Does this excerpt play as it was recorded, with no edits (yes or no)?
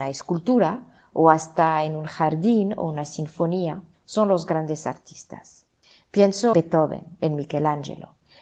no